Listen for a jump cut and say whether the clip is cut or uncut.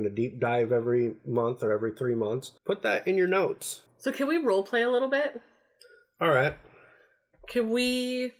cut